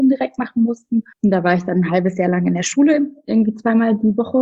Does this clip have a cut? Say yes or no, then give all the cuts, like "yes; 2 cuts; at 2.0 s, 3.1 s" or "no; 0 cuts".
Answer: yes; 1 cut; at 1.1 s